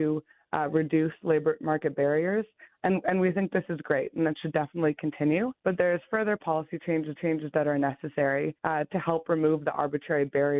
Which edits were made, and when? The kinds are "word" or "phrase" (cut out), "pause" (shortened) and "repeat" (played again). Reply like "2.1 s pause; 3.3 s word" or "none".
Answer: 5.6 s pause; 7.2 s repeat; 8.6 s pause